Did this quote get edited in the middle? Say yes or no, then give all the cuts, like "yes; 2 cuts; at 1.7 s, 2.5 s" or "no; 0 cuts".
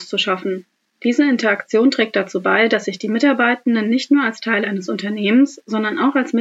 no; 0 cuts